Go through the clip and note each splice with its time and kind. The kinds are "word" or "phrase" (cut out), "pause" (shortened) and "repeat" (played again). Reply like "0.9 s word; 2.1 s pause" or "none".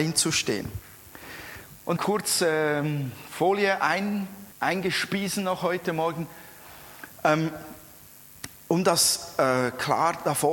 2.0 s phrase; 4.5 s pause